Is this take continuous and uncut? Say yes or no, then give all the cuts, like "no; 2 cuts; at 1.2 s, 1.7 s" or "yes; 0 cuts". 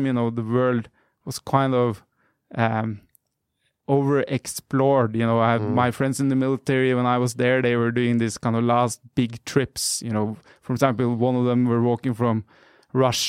yes; 0 cuts